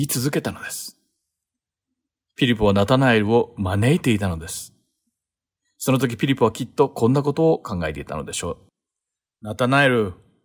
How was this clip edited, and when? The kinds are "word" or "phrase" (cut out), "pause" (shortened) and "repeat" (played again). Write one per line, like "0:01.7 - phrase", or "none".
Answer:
none